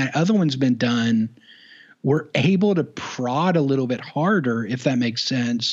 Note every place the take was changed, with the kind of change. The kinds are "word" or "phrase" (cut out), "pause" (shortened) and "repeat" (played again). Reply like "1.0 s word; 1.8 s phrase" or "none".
none